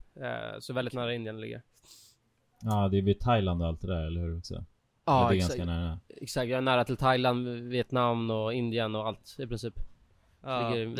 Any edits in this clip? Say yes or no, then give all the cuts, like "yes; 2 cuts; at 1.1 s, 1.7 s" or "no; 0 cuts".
no; 0 cuts